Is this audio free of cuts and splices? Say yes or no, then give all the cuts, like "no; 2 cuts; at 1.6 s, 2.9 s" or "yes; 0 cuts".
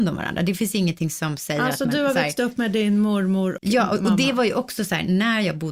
no; 1 cut; at 3.6 s